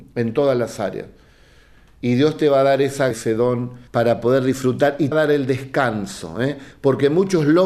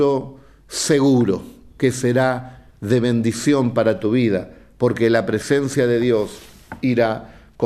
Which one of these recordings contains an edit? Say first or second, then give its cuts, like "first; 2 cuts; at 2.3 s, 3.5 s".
first; 3 cuts; at 3.1 s, 3.9 s, 5.1 s